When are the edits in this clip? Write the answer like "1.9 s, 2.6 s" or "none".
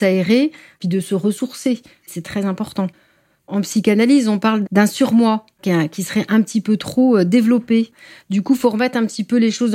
4.6 s